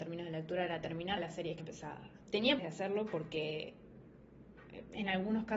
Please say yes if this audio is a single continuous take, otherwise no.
no